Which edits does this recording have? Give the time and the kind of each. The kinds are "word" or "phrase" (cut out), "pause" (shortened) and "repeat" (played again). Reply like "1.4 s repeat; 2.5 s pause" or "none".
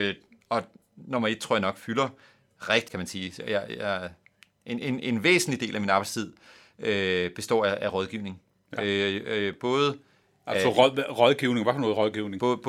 2.9 s phrase